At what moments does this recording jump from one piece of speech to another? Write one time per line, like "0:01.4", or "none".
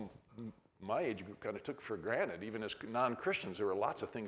none